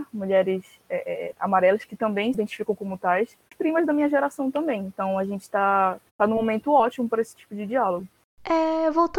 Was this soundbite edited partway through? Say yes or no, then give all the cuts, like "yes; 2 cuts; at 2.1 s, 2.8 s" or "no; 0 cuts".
yes; 2 cuts; at 3.5 s, 6.1 s